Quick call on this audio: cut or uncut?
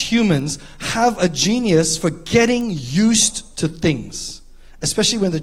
uncut